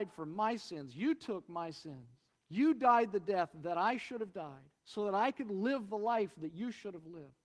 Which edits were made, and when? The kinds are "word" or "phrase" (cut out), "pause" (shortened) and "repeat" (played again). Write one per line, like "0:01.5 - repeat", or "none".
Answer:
0:02.3 - pause
0:04.8 - pause